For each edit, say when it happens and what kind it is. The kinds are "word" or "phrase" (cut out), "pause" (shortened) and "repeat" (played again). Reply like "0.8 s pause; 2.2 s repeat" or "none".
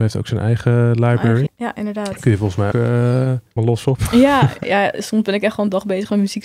1.5 s word; 2.7 s word; 3.6 s word; 4.6 s word